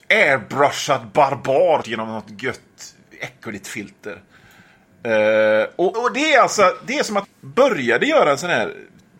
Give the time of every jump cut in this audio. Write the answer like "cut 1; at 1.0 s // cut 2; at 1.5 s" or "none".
cut 1; at 1.8 s // cut 2; at 5.9 s // cut 3; at 7.2 s